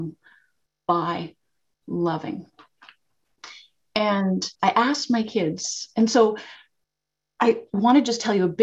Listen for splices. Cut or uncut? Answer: cut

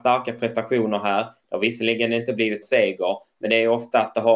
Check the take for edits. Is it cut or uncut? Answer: cut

